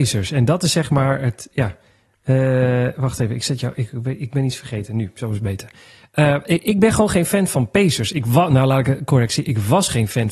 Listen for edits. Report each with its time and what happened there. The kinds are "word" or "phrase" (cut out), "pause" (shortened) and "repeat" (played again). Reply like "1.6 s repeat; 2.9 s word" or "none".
none